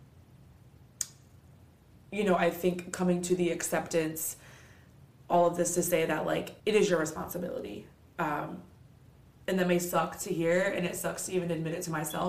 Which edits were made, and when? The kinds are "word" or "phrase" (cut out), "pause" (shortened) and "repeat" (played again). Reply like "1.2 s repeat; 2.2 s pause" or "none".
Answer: 6.6 s pause